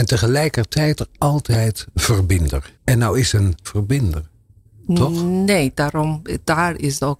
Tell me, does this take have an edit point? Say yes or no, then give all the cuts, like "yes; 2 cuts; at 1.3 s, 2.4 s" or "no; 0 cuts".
yes; 3 cuts; at 1.0 s, 2.8 s, 3.6 s